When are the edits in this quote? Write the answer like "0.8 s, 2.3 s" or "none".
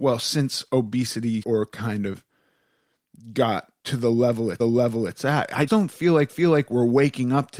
1.4 s, 3.8 s, 4.6 s, 5.7 s, 6.3 s